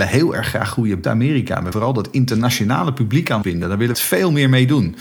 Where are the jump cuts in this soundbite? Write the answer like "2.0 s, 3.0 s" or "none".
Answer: 1.0 s, 1.7 s, 3.4 s, 3.9 s